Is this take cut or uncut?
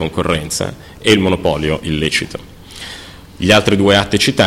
uncut